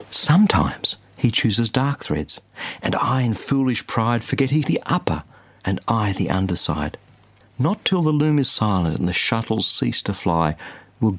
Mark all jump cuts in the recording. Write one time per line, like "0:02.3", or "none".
0:04.6